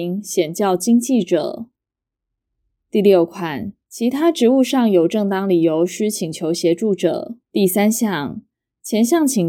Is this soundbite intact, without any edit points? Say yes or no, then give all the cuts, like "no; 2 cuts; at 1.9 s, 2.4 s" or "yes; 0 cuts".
no; 2 cuts; at 3.8 s, 7.4 s